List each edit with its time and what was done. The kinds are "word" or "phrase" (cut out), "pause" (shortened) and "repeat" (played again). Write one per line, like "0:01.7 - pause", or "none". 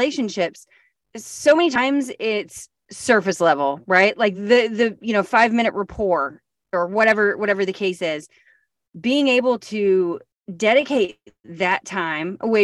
none